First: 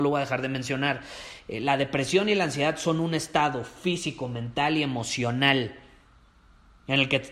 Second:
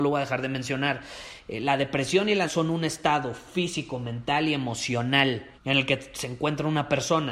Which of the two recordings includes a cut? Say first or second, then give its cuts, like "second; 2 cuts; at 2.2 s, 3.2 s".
second; 2 cuts; at 2.5 s, 5.6 s